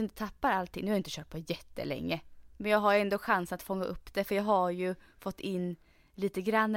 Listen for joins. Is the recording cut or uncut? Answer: uncut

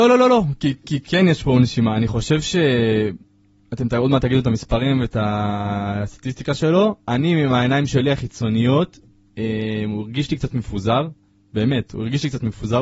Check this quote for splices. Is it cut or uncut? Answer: uncut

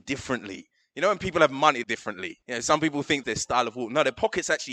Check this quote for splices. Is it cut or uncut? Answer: cut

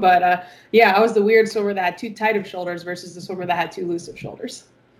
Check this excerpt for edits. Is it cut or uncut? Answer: uncut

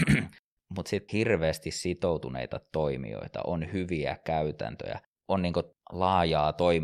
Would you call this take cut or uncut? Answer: cut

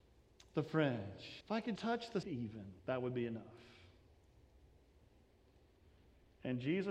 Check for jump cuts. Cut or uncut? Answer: cut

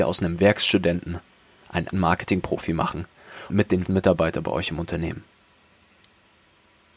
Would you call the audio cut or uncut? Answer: cut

